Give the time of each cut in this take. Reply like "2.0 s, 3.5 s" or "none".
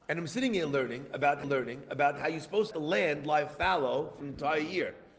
1.4 s, 2.7 s, 4.2 s